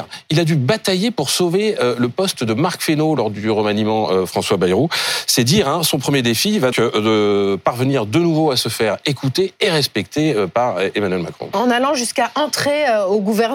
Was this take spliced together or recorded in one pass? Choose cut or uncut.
cut